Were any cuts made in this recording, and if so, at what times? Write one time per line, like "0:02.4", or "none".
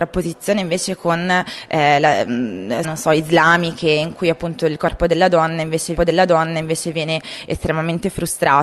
0:02.8
0:06.0